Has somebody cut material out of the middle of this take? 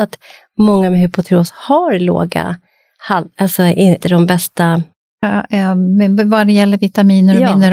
yes; 1 cut; at 4.0 s

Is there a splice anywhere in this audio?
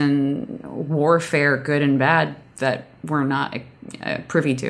no; 0 cuts

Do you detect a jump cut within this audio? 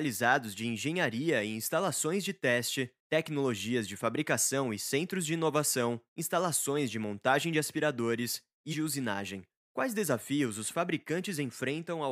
yes; 4 cuts; at 3.0 s, 6.1 s, 8.7 s, 9.6 s

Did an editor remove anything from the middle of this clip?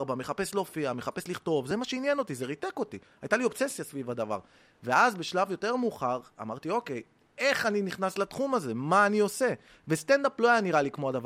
no; 0 cuts

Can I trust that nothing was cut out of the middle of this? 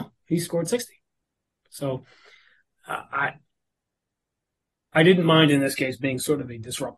yes; 0 cuts

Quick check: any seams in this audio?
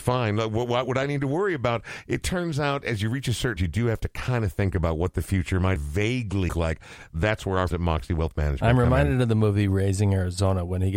yes; 4 cuts; at 3.6 s, 5.8 s, 6.5 s, 7.7 s

